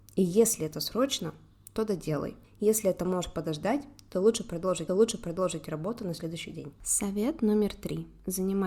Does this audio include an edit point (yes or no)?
yes